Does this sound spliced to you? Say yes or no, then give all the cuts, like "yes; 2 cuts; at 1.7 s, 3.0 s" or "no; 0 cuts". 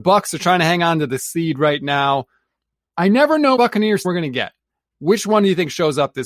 yes; 3 cuts; at 1.2 s, 3.6 s, 4.0 s